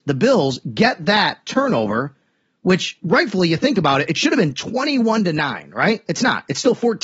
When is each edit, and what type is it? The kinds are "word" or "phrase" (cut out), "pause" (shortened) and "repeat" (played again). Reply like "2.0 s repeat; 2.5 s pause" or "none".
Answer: none